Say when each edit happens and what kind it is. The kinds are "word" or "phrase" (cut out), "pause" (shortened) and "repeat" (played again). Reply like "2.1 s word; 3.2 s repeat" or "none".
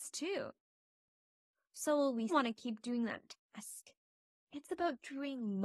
2.3 s word; 3.4 s pause